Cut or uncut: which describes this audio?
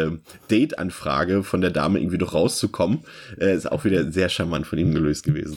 uncut